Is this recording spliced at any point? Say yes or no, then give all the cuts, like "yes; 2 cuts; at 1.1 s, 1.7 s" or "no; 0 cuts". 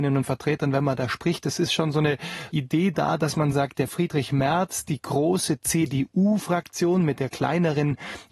no; 0 cuts